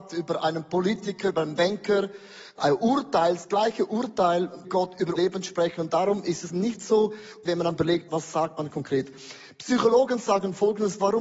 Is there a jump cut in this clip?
yes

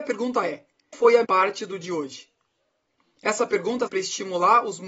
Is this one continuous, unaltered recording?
no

